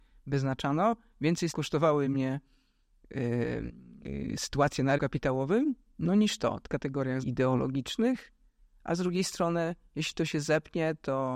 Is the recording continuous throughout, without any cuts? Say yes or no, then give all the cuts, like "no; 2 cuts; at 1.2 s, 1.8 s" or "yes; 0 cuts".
no; 4 cuts; at 1.5 s, 5.0 s, 6.7 s, 7.2 s